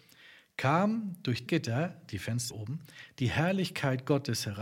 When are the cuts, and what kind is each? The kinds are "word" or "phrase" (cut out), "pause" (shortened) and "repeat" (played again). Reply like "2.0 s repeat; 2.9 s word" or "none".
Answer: 1.5 s word; 2.5 s word